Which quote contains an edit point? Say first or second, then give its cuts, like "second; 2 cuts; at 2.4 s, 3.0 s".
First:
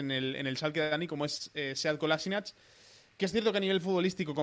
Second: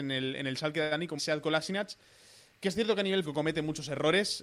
second; 2 cuts; at 1.2 s, 3.2 s